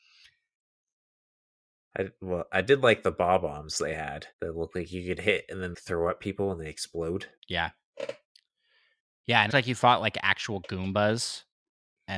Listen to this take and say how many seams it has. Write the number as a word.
four